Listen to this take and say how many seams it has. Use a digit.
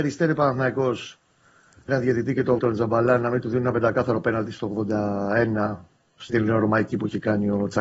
3